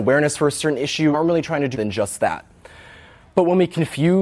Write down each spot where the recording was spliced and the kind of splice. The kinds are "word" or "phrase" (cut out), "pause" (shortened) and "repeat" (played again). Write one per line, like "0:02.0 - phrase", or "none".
0:01.1 - word
0:01.7 - word